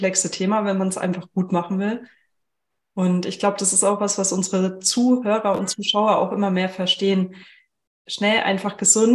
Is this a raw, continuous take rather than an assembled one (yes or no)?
yes